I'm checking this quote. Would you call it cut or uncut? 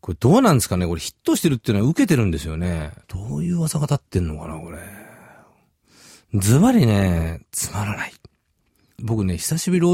cut